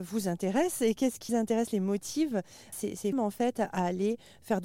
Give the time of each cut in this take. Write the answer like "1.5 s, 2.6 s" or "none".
1.3 s, 2.7 s, 3.1 s